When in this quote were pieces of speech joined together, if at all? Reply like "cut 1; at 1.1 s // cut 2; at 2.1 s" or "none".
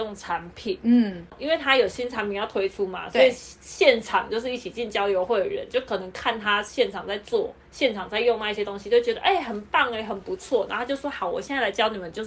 cut 1; at 7.6 s